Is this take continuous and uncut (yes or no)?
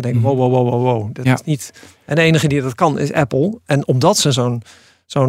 yes